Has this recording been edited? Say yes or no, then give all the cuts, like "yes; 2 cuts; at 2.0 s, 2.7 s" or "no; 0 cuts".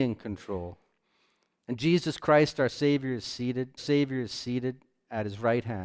yes; 1 cut; at 3.8 s